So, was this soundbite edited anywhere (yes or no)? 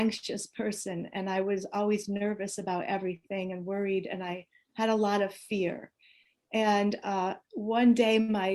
no